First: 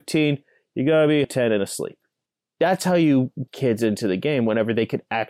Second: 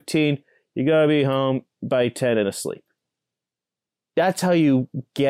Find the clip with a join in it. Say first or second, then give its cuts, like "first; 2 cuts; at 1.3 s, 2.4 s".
first; 3 cuts; at 1.2 s, 2.3 s, 3.5 s